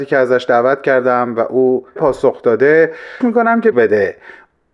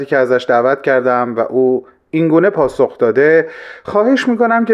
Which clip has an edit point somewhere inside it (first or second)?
first